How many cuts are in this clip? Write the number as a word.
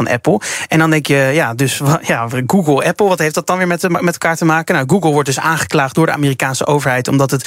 zero